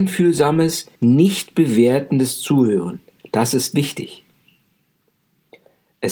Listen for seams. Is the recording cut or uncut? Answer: cut